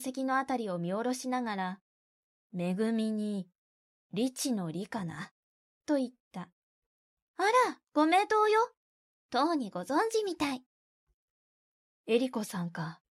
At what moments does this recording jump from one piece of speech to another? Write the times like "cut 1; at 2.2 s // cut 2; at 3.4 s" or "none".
none